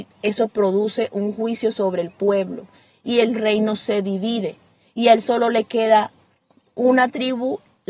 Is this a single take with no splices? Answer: yes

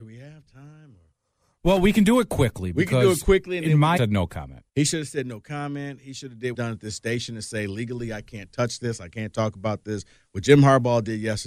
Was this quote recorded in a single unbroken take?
no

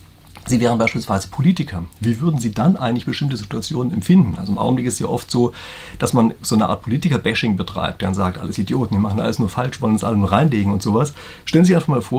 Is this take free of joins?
yes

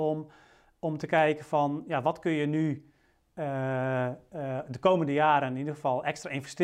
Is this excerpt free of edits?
yes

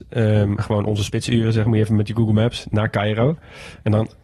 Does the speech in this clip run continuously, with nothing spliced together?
no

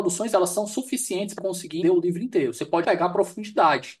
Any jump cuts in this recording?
yes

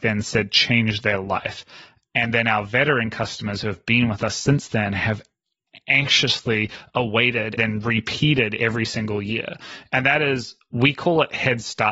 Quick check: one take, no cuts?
no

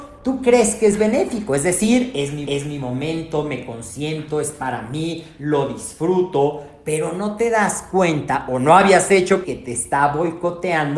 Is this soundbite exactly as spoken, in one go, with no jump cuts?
no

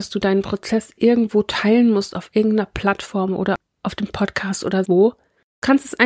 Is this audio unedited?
no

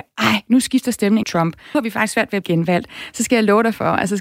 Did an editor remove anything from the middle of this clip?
yes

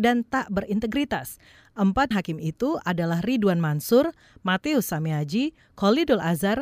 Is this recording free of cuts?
no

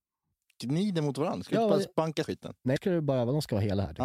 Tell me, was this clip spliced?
yes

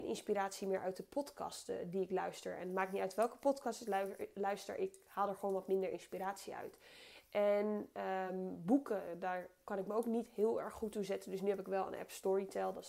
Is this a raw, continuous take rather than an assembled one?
yes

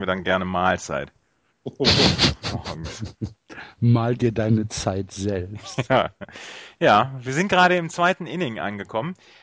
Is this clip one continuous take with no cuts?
yes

